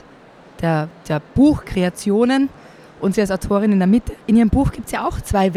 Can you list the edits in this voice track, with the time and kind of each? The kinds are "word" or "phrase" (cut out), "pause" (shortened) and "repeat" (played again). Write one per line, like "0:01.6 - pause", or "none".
0:01.2 - pause
0:04.2 - pause